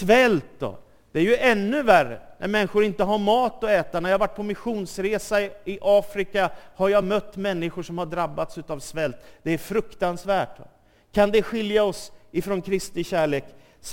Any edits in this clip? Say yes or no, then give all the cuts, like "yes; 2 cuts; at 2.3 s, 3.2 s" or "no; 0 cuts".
no; 0 cuts